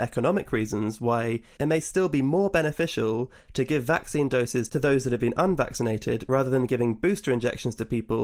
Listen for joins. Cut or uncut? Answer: uncut